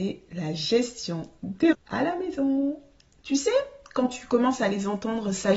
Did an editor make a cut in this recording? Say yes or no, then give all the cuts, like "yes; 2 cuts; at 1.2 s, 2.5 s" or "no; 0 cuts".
yes; 1 cut; at 1.7 s